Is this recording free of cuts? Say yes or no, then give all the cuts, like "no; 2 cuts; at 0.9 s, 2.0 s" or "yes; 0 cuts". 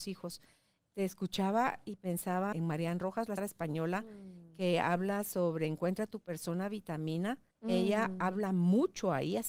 no; 3 cuts; at 2.5 s, 3.4 s, 7.5 s